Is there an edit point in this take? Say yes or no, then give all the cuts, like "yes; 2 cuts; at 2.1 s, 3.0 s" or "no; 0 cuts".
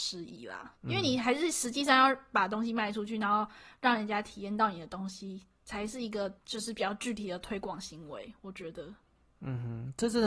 no; 0 cuts